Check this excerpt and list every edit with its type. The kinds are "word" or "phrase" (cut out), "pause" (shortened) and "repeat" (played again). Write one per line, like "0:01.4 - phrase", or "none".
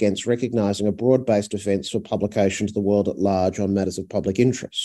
none